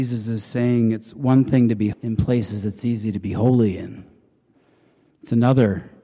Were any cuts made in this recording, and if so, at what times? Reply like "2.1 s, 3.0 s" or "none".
1.9 s